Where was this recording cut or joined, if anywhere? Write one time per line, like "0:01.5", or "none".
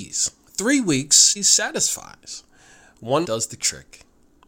0:01.4
0:03.2